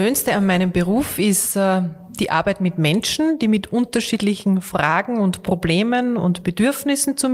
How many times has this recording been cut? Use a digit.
0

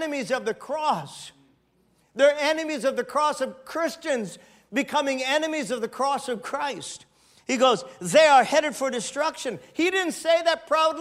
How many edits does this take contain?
0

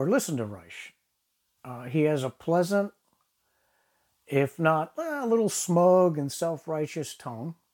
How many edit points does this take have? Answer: 0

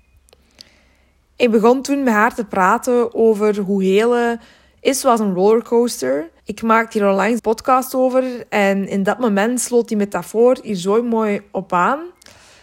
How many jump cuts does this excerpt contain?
2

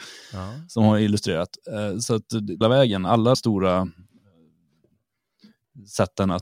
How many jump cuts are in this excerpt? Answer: 2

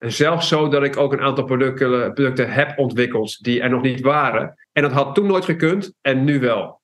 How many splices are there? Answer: 1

